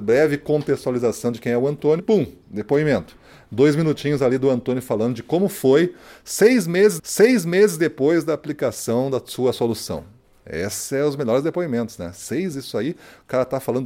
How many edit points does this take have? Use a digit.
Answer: 3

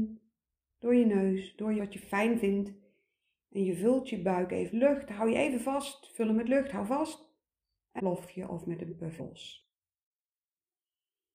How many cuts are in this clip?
4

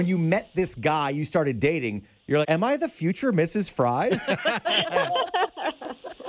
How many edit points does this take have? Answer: 1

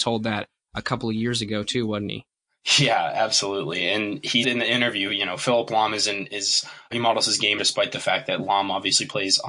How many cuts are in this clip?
3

